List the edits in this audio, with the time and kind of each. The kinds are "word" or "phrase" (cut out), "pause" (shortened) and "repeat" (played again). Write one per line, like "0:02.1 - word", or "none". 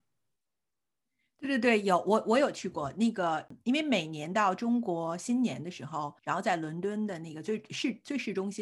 0:06.2 - pause